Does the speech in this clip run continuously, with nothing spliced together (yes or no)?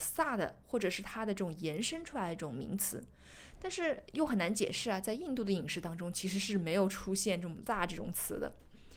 no